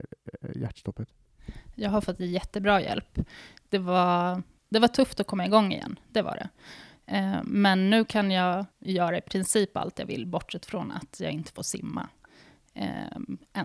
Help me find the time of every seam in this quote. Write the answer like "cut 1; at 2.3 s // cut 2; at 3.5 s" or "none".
cut 1; at 8.7 s